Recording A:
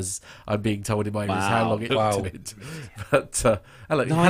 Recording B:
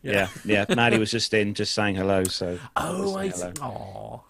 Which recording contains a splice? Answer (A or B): A